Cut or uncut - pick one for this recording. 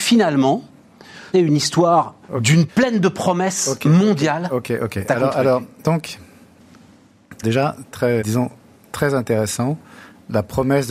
cut